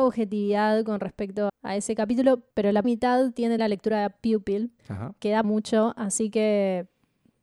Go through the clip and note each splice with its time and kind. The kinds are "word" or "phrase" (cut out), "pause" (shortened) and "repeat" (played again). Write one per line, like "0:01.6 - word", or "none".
0:01.5 - word
0:02.8 - word
0:03.6 - word
0:04.8 - pause
0:05.4 - word